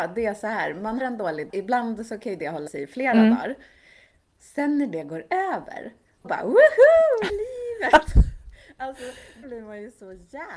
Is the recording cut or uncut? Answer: cut